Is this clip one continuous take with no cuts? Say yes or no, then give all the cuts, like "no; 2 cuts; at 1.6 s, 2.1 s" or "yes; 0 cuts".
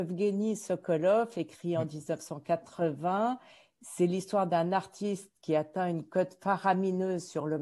yes; 0 cuts